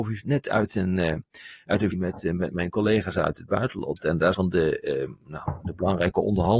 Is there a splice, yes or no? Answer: yes